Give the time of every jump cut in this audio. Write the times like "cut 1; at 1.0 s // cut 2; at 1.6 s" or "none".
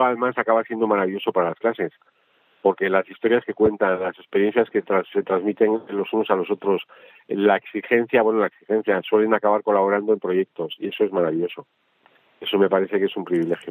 none